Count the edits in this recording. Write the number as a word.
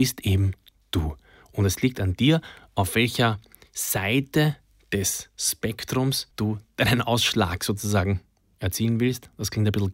one